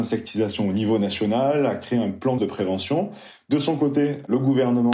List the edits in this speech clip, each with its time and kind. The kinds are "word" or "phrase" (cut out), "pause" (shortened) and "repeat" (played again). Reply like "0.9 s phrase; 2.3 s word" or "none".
2.4 s word